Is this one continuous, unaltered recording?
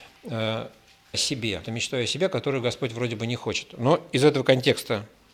no; 2 cuts; at 1.1 s, 1.6 s

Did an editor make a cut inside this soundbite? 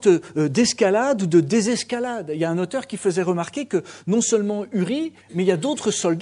yes; 1 cut; at 5.2 s

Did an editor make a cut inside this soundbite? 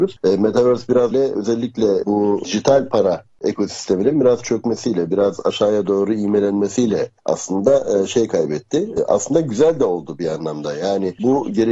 yes; 1 cut; at 1.1 s

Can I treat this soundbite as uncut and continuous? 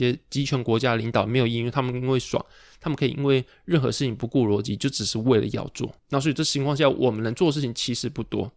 no; 1 cut; at 6.0 s

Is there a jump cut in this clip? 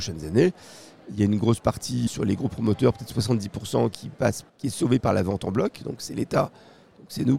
yes; 2 cuts; at 2.1 s, 4.5 s

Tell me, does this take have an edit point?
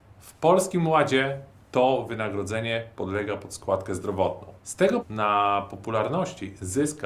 yes; 2 cuts; at 4.6 s, 5.0 s

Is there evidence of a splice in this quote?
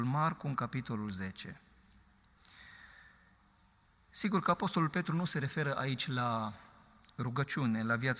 no; 0 cuts

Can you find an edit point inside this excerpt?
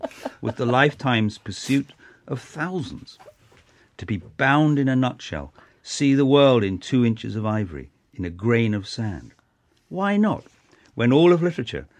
no; 0 cuts

